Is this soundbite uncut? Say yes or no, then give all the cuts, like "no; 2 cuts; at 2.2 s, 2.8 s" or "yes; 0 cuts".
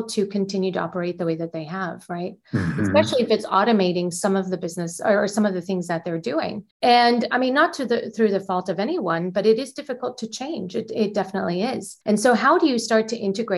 no; 2 cuts; at 6.7 s, 12.0 s